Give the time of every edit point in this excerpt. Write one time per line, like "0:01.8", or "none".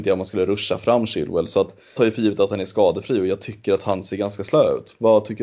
0:02.0

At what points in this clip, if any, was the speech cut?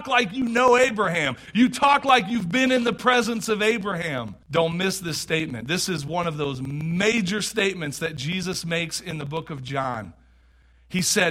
0:04.4

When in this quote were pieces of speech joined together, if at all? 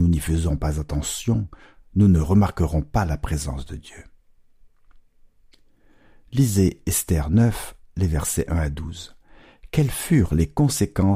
none

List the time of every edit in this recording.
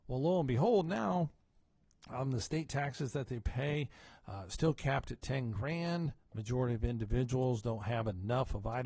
none

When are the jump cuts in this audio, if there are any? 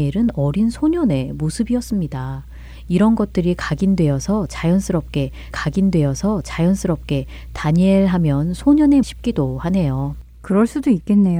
0:05.5
0:09.0

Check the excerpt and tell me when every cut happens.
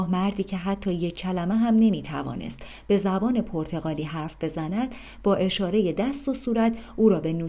none

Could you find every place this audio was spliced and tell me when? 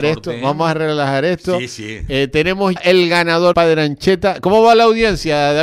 0:02.8
0:03.5

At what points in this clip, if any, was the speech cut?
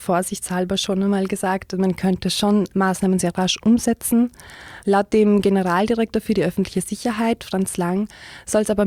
0:02.7

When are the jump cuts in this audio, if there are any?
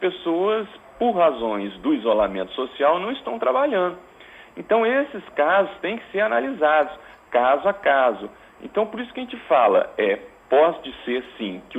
none

